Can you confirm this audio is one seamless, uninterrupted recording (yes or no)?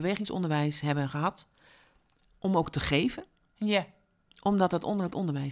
yes